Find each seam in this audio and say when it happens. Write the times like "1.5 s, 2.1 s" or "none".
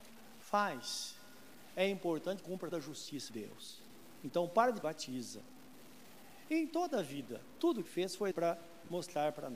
2.4 s, 2.7 s, 3.3 s, 4.8 s, 7.8 s, 8.3 s